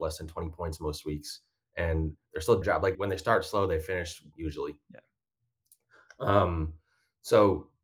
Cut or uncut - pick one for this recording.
cut